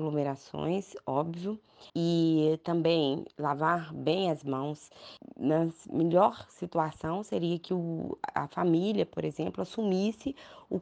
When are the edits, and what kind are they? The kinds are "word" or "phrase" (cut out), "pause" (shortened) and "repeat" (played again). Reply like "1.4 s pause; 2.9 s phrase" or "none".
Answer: 1.9 s pause